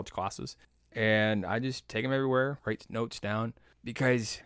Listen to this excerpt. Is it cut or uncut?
uncut